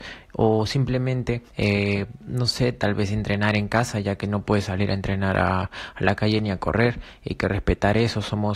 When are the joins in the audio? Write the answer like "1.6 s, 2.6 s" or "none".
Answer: 1.5 s